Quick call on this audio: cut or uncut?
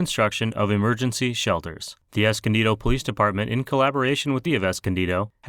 cut